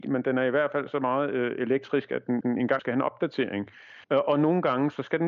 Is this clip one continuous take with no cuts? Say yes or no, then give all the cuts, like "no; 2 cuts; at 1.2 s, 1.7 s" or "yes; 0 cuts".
no; 3 cuts; at 2.4 s, 2.8 s, 4.0 s